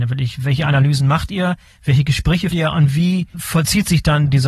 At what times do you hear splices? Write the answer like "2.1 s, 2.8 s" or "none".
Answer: 2.5 s